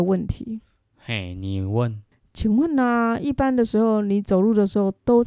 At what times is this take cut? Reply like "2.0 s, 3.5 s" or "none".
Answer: 2.1 s